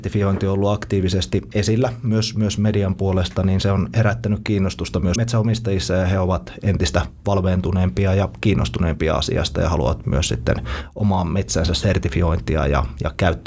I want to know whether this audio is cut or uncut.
cut